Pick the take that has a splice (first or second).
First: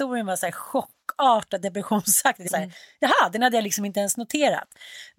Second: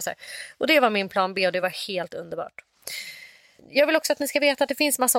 first